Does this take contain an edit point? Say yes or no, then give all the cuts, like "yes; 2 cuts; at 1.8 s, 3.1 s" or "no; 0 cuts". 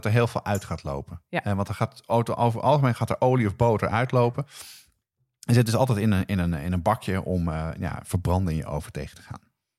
no; 0 cuts